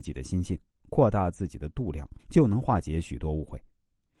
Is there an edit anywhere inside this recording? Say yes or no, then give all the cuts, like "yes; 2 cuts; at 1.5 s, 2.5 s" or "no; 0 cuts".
yes; 1 cut; at 2.2 s